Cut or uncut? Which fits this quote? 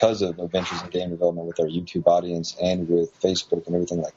cut